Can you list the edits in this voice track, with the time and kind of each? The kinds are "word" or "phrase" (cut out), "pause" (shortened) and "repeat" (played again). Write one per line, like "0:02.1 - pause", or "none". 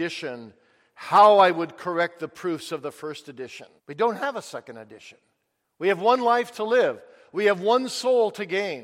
0:03.8 - pause